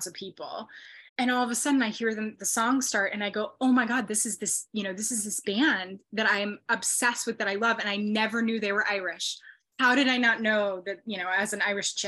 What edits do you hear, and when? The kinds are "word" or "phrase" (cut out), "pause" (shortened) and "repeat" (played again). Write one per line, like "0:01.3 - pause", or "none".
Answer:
0:01.1 - pause